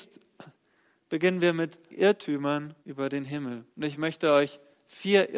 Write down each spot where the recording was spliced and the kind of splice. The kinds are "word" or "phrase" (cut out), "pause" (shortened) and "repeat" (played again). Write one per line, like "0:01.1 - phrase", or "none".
0:01.9 - word
0:02.8 - pause
0:03.7 - pause